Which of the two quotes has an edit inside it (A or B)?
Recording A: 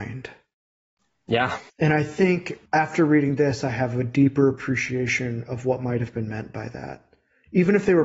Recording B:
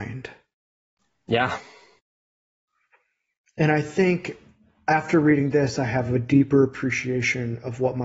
A